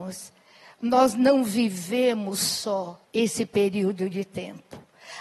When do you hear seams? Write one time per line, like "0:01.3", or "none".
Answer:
0:03.0